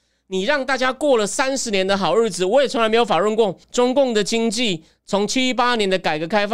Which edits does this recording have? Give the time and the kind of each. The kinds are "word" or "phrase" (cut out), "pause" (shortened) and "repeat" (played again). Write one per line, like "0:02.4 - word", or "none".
0:03.6 - pause